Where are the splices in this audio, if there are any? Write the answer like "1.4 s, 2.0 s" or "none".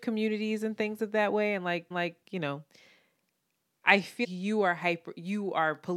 1.9 s, 4.2 s